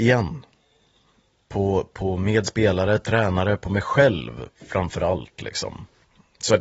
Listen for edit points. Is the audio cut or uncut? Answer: uncut